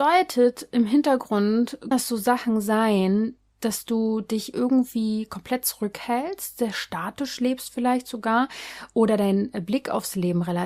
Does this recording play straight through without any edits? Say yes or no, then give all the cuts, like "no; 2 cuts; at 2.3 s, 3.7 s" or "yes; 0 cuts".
no; 2 cuts; at 1.9 s, 3.5 s